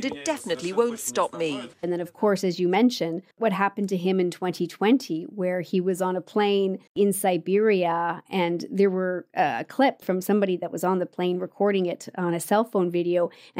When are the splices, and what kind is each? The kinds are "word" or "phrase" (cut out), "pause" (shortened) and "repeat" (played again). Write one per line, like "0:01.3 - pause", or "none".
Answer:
0:01.7 - pause
0:03.3 - pause
0:06.9 - pause